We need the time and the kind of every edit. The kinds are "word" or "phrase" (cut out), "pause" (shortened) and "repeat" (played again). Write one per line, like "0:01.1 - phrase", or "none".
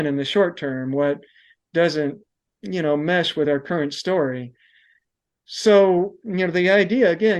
none